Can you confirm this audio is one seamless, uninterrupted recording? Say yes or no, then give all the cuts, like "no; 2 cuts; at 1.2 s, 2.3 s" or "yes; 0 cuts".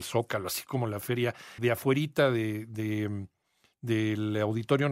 no; 1 cut; at 1.6 s